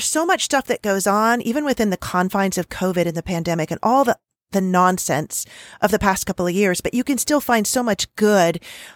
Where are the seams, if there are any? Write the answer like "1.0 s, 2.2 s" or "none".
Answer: none